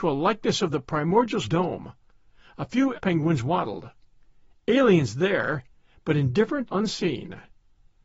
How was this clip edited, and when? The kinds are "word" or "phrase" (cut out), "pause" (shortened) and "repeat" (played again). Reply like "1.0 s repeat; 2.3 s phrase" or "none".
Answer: 1.4 s word; 2.9 s word; 6.7 s word